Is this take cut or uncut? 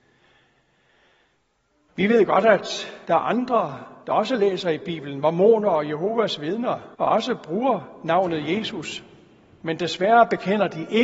cut